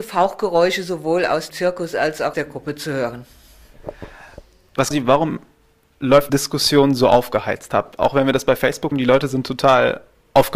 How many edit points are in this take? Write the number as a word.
five